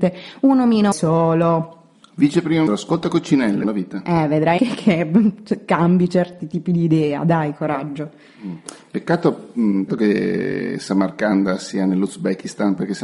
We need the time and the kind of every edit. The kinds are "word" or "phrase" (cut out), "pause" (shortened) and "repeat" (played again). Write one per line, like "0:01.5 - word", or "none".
0:00.9 - phrase
0:02.7 - word
0:03.6 - phrase
0:04.6 - word
0:09.9 - word